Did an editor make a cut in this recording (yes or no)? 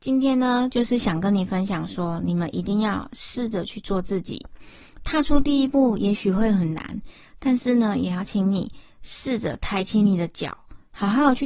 no